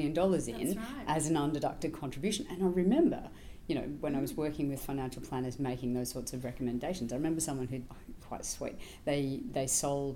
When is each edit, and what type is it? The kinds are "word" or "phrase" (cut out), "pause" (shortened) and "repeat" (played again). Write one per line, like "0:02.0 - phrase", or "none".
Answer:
0:07.9 - word
0:08.2 - word